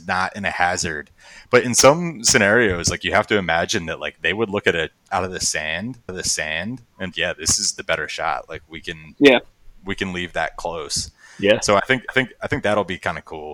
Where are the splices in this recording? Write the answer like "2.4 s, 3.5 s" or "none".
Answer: 5.1 s, 6.1 s, 7.1 s, 12.1 s

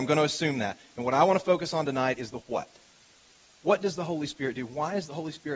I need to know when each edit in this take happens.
none

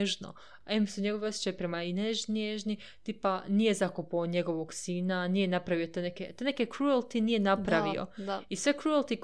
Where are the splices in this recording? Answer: none

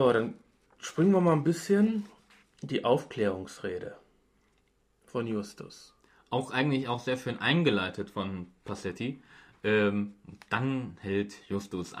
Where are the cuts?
none

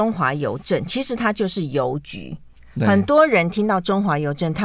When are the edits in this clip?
none

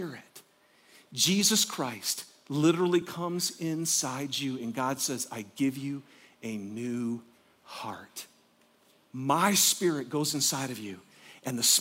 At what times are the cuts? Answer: none

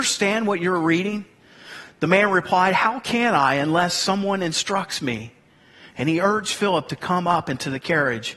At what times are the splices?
none

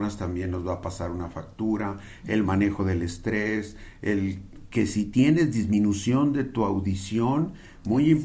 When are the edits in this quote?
none

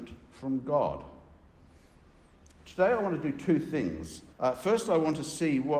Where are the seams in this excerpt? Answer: 4.3 s

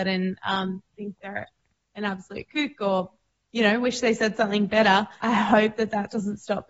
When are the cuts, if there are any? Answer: 5.2 s

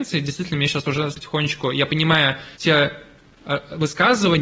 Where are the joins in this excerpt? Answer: 1.1 s, 2.5 s

